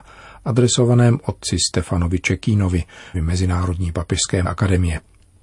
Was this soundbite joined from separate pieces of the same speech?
yes; 2 cuts; at 3.1 s, 4.5 s

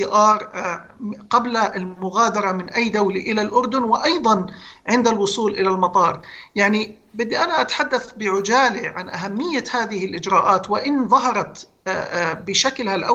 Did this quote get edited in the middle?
no; 0 cuts

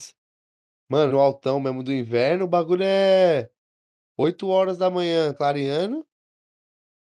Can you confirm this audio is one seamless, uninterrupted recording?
no; 2 cuts; at 1.1 s, 5.3 s

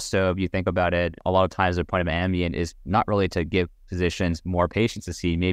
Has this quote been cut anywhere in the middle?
no; 0 cuts

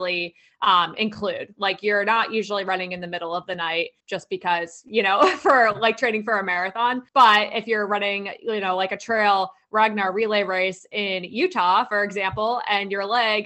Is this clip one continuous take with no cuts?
no; 2 cuts; at 4.0 s, 7.1 s

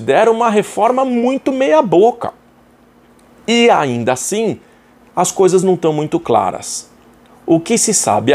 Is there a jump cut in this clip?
no; 0 cuts

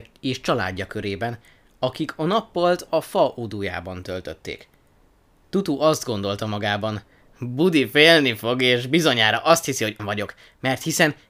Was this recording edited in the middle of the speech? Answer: yes; 1 cut; at 10.0 s

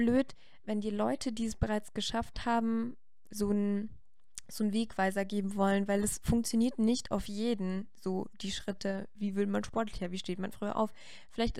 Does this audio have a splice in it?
no; 0 cuts

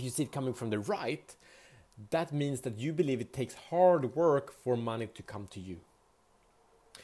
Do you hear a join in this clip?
no; 0 cuts

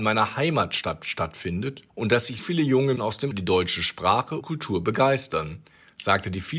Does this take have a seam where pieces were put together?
yes; 5 cuts; at 1.9 s, 2.4 s, 3.0 s, 3.3 s, 4.4 s

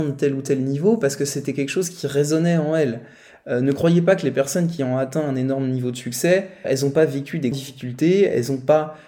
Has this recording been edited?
yes; 2 cuts; at 6.6 s, 7.5 s

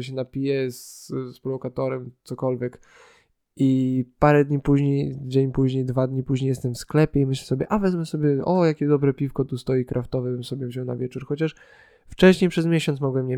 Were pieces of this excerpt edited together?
no; 0 cuts

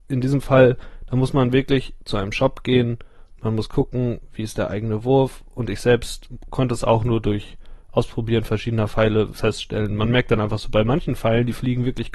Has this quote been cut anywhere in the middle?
no; 0 cuts

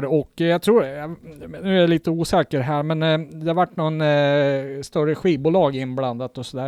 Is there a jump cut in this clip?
no; 0 cuts

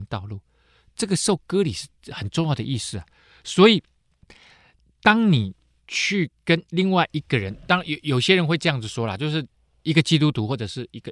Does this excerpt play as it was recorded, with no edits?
yes; 0 cuts

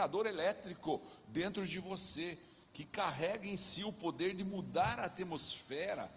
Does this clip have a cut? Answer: no; 0 cuts

